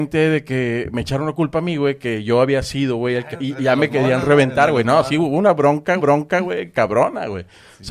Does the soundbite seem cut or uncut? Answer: cut